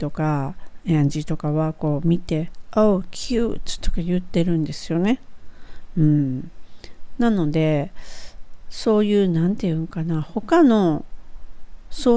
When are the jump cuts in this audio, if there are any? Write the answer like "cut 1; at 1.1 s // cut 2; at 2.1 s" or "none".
cut 1; at 3.0 s